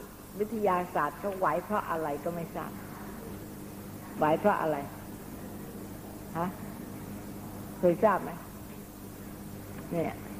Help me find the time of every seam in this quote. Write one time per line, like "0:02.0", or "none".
none